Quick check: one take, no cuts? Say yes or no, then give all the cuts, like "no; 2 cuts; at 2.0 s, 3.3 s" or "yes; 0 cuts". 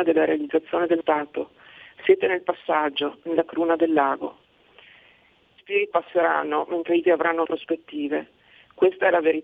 no; 5 cuts; at 1.0 s, 5.6 s, 5.9 s, 7.0 s, 7.4 s